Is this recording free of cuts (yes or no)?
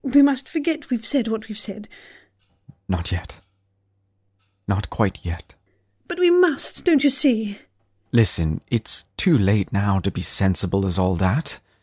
yes